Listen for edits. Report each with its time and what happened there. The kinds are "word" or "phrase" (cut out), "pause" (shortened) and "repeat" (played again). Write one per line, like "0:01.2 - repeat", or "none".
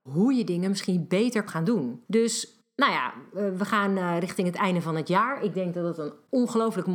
0:01.5 - word
0:02.1 - pause